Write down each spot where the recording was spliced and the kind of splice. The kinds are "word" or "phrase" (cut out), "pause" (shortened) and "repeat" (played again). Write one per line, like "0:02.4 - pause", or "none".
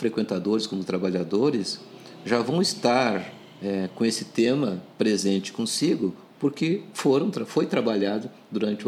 0:04.9 - pause